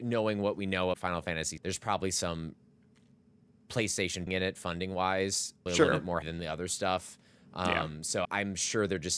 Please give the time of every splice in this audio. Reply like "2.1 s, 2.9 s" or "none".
0.9 s, 1.6 s, 4.3 s, 5.7 s, 6.2 s, 8.2 s